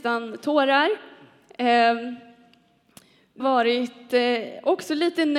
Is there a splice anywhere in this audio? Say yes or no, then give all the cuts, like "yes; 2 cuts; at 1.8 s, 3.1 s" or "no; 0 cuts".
yes; 1 cut; at 3.4 s